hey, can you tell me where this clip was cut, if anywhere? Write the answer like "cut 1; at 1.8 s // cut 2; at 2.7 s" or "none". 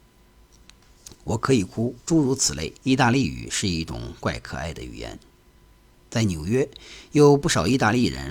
cut 1; at 2.0 s // cut 2; at 2.8 s